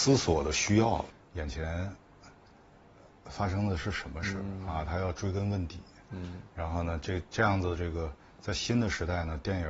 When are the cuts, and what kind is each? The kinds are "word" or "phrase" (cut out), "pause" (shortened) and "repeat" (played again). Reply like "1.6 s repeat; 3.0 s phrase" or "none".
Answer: none